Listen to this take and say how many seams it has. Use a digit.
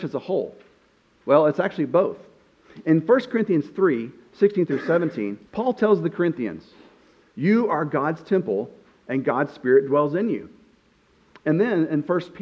1